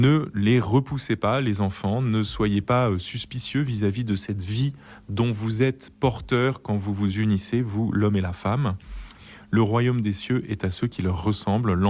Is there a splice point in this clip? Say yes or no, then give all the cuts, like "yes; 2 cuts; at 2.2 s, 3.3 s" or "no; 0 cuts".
no; 0 cuts